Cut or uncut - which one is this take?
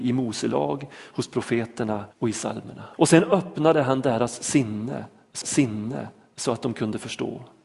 cut